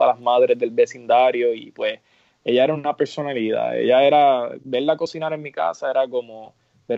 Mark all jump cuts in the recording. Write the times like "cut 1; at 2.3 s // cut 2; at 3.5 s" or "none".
none